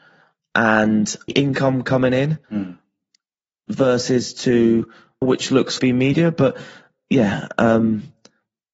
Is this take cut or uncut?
cut